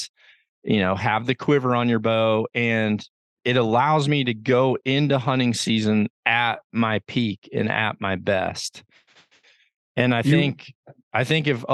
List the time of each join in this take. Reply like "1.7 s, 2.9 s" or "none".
3.4 s, 6.1 s